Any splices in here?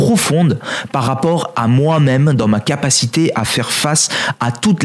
no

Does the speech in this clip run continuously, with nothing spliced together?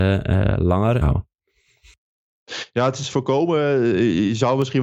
no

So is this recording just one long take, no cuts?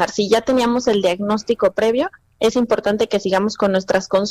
yes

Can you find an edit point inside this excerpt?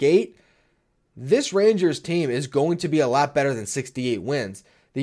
no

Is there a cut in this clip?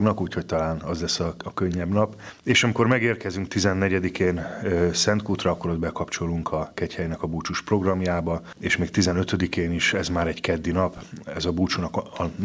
no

